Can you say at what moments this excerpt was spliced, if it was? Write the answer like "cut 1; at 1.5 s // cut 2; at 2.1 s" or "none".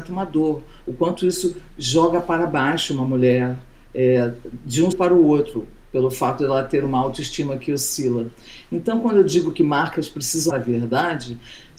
cut 1; at 4.9 s // cut 2; at 10.5 s